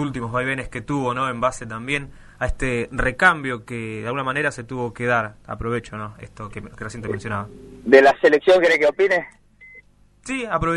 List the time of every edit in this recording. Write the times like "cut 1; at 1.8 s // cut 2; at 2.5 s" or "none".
cut 1; at 6.5 s